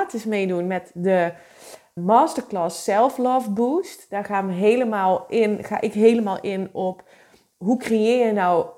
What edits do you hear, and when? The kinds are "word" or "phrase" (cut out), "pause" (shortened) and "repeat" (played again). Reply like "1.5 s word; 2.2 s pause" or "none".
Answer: 2.0 s word